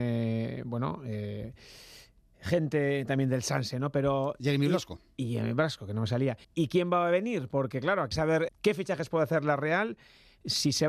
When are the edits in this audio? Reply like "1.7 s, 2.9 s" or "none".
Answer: 6.4 s, 8.1 s, 8.5 s

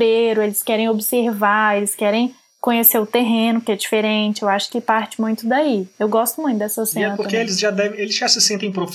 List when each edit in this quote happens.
none

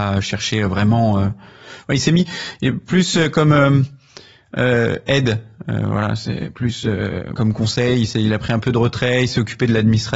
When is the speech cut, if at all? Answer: 7.4 s

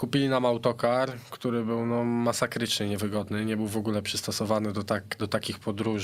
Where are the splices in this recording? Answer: none

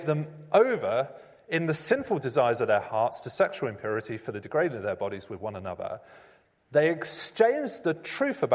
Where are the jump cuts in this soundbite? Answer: none

